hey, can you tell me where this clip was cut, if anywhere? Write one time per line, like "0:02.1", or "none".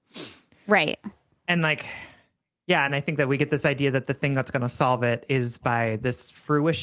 none